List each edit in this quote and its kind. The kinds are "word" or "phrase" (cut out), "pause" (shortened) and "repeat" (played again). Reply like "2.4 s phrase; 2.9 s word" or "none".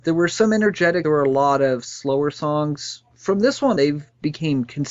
1.0 s phrase; 3.8 s word